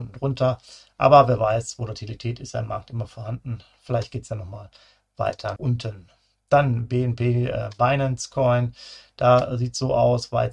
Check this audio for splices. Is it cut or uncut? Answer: cut